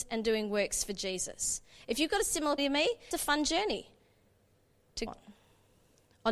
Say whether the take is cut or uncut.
cut